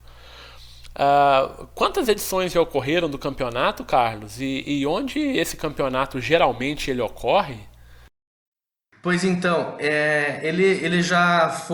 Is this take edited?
no; 0 cuts

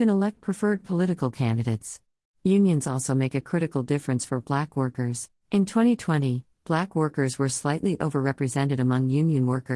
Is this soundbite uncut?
no; 2 cuts; at 2.2 s, 5.4 s

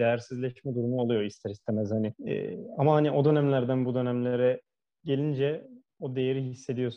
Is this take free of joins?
no; 1 cut; at 2.2 s

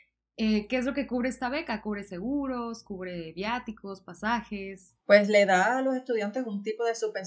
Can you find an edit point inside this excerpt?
yes; 1 cut; at 5.0 s

